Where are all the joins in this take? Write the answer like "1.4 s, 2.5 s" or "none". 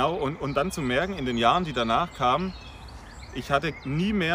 none

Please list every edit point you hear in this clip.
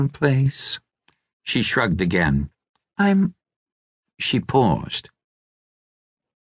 2.8 s

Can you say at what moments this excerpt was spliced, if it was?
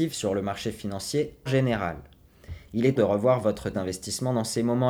1.5 s, 3.0 s, 3.7 s

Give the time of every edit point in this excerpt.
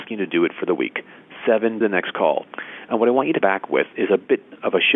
1.8 s, 3.4 s

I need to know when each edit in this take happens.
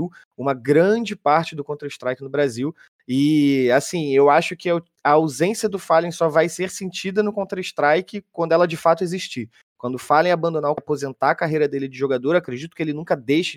10.8 s

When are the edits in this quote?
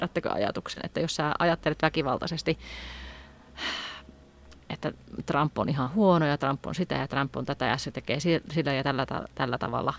none

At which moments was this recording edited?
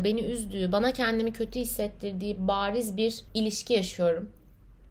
3.3 s

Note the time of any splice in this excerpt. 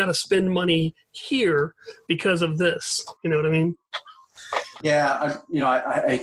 3.2 s, 4.8 s

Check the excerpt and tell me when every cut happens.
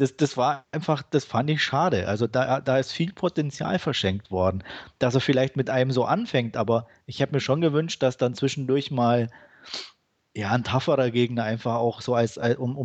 none

